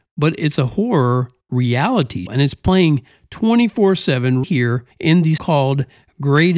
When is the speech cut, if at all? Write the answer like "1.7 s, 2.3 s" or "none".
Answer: 2.3 s, 4.4 s, 4.9 s, 5.4 s

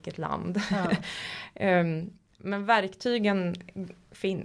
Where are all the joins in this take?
none

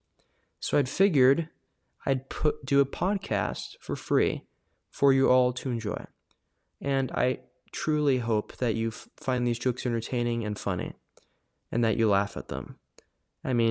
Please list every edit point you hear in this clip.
none

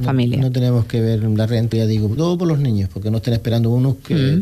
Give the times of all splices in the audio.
1.7 s, 2.2 s

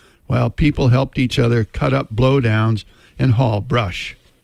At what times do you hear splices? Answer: none

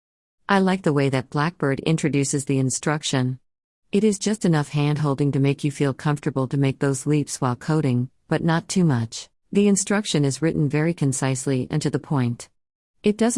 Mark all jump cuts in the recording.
9.3 s

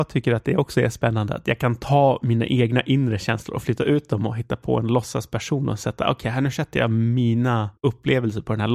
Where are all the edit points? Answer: 7.8 s

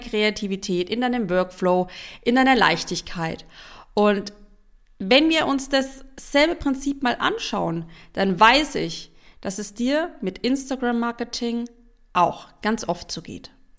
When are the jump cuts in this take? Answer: none

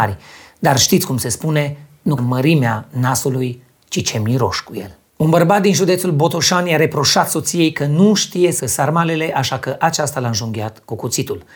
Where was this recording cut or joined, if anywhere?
2.2 s, 8.6 s

